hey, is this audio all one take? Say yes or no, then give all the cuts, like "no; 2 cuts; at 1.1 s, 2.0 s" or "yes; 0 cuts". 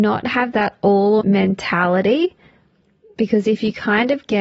no; 1 cut; at 1.2 s